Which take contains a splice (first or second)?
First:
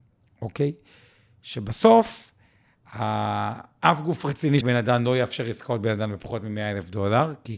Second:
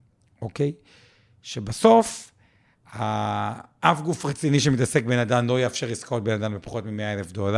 first